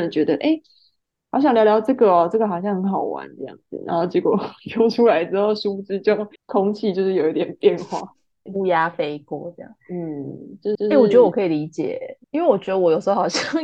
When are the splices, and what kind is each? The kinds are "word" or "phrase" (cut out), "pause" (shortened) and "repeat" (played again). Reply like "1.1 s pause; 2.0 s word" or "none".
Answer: 6.4 s pause; 8.5 s word; 9.8 s pause; 10.7 s repeat; 12.2 s pause